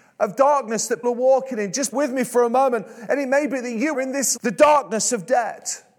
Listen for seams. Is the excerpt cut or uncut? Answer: cut